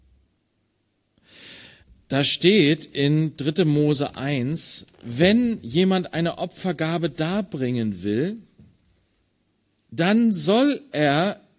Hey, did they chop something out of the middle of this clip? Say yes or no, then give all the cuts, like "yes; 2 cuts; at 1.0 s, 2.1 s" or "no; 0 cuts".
yes; 2 cuts; at 1.8 s, 9.3 s